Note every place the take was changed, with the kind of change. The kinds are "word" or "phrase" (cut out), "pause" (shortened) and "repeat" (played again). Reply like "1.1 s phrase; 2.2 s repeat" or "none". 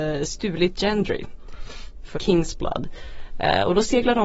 2.1 s phrase